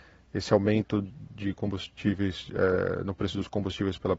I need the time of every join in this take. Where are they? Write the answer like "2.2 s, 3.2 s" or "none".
none